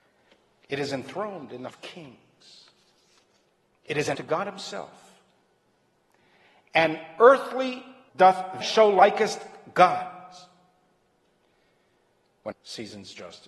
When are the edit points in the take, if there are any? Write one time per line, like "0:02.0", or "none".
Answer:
0:01.7
0:04.1
0:08.1
0:08.6
0:12.5